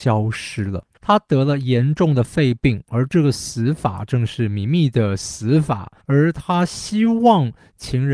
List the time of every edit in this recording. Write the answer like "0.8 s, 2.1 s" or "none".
0.9 s, 6.0 s